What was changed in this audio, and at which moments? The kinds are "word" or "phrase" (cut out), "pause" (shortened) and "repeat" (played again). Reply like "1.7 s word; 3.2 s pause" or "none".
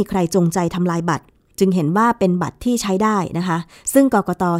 none